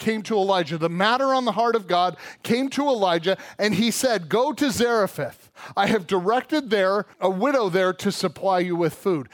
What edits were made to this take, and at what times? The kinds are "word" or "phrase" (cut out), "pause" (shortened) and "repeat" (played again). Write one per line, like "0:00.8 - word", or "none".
0:07.1 - pause